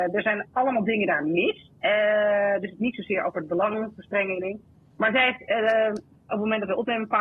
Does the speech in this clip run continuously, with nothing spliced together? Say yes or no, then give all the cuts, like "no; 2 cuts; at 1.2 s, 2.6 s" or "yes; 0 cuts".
yes; 0 cuts